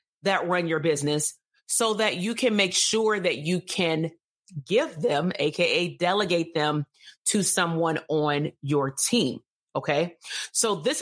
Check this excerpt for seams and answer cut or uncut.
uncut